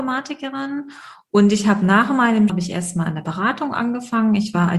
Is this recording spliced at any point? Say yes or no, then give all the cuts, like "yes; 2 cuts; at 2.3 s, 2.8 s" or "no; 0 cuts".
yes; 1 cut; at 2.5 s